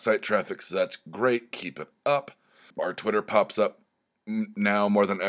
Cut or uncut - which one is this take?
cut